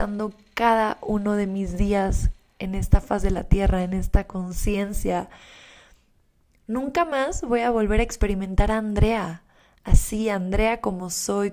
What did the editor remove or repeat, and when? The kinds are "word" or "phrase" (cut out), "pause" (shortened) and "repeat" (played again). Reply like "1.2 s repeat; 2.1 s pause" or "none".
none